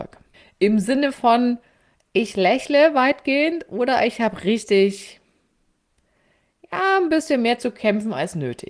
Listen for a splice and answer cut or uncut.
uncut